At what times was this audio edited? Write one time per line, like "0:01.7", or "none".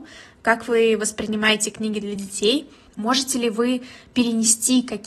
none

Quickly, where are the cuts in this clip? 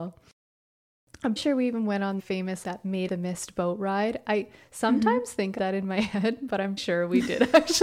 0:01.4
0:02.2
0:02.6
0:03.1
0:05.6
0:06.8

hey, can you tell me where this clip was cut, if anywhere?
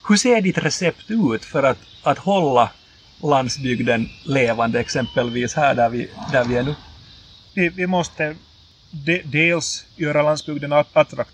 0:09.9

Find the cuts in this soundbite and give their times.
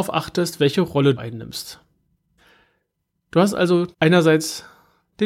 0:01.2
0:02.4
0:03.9

